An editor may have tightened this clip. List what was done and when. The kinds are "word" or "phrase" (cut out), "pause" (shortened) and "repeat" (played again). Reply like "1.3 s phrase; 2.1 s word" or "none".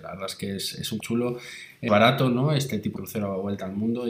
1.0 s phrase; 1.9 s phrase; 3.0 s word

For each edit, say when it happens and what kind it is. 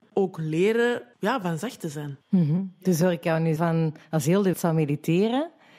1.1 s pause; 2.2 s pause; 3.6 s word; 4.5 s word

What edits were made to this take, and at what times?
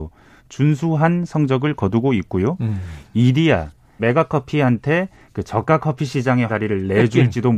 4.0 s word; 6.5 s word

